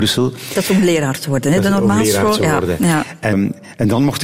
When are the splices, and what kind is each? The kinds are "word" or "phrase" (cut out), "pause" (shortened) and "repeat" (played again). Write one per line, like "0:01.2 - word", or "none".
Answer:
0:03.3 - word

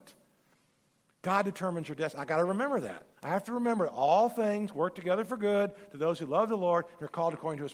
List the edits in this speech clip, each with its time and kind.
0:03.1 - pause

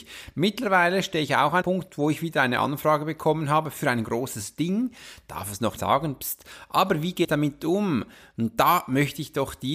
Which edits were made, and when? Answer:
0:01.6 - word
0:05.8 - word
0:07.2 - word

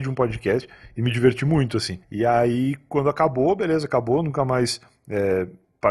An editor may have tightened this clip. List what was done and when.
0:02.0 - pause

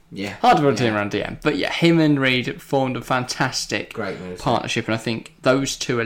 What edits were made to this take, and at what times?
none

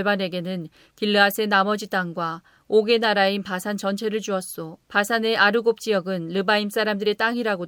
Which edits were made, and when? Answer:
0:04.8 - pause

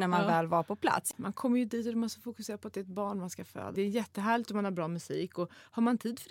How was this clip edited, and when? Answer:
none

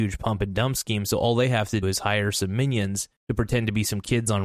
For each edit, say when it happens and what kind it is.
0:01.8 - word
0:03.2 - pause

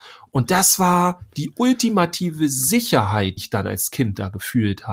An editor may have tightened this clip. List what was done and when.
0:03.4 - word

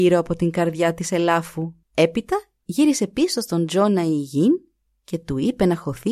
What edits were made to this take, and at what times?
0:01.8 - pause

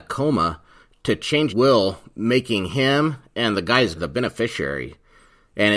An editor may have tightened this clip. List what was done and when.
0:01.5 - word
0:04.0 - word

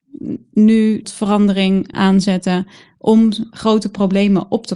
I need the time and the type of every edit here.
0:01.0 - word
0:01.9 - word

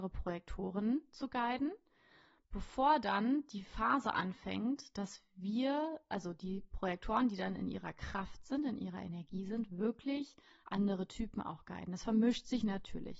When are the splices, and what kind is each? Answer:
none

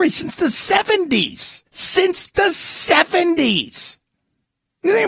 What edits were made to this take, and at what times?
0:01.7 - pause

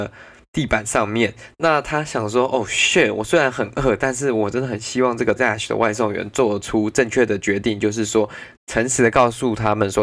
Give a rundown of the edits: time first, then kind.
0:05.4 - word
0:08.6 - pause

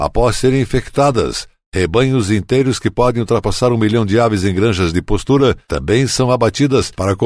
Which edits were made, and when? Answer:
none

